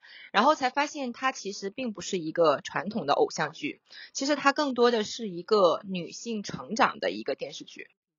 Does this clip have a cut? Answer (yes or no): no